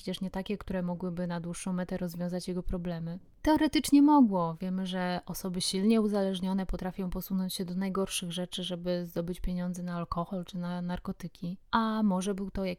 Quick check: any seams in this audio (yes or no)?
yes